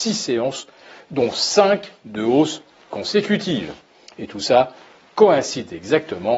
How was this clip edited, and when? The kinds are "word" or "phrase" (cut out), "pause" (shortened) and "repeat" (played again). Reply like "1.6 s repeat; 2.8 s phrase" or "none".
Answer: none

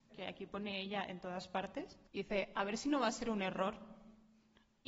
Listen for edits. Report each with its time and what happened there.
2.1 s pause

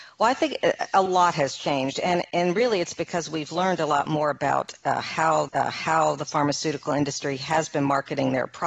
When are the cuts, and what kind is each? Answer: 5.5 s repeat

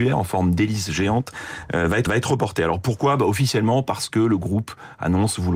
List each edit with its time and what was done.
2.1 s repeat

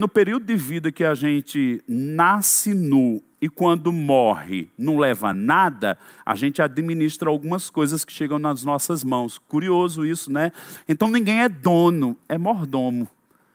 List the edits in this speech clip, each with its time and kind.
none

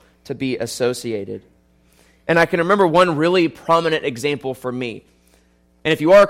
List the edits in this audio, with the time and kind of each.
none

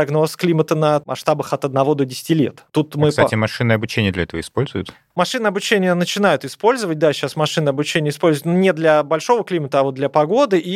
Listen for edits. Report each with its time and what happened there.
none

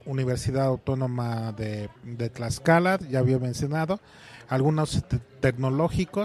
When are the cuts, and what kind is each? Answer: 2.0 s pause

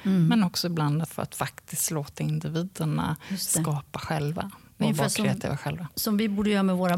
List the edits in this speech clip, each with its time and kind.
1.0 s phrase

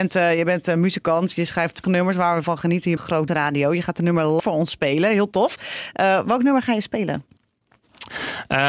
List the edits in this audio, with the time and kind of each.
1.8 s word; 2.4 s word; 3.0 s word; 3.3 s word; 4.4 s word

